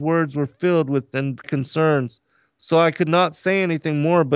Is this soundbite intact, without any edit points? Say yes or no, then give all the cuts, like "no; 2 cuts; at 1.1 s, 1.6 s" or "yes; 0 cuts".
no; 2 cuts; at 1.1 s, 1.4 s